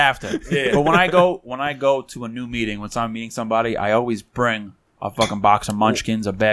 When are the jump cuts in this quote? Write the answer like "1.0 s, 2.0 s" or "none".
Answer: none